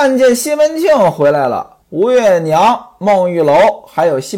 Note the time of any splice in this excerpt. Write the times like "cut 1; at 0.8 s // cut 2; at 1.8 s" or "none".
cut 1; at 1.8 s